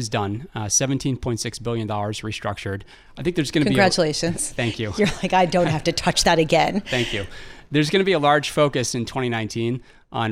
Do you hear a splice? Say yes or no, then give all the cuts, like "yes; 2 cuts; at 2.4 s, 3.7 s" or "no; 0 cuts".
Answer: no; 0 cuts